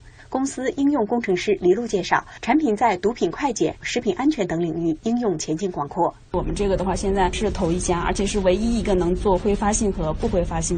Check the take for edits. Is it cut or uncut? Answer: cut